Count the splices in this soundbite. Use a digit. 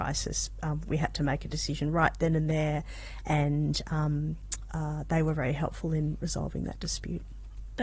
0